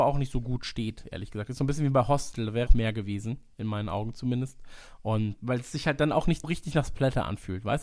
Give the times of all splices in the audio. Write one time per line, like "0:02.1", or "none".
0:02.7
0:05.4
0:06.4